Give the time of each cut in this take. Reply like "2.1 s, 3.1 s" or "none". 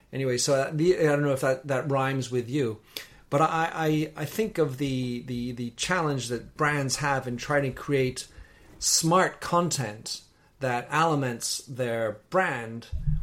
none

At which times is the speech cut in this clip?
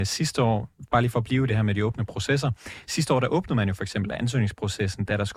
none

